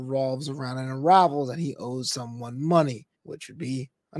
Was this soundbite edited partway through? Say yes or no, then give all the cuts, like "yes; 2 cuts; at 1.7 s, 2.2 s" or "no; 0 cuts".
yes; 1 cut; at 3.2 s